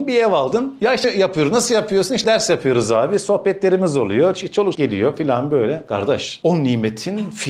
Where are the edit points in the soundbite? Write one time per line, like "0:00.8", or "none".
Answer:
0:01.0
0:02.2
0:04.7